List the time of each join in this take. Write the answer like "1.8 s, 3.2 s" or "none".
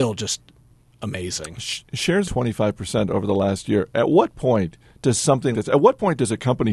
2.2 s, 5.5 s